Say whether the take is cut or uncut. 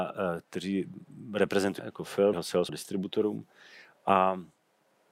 cut